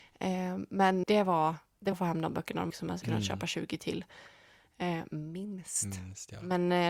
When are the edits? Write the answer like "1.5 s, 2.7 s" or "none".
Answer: 1.0 s, 1.9 s, 2.7 s, 3.0 s